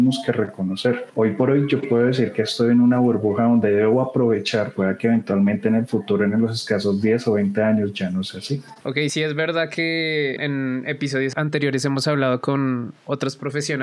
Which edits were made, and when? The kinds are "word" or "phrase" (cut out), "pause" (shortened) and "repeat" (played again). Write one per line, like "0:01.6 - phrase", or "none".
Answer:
0:04.8 - word
0:08.8 - pause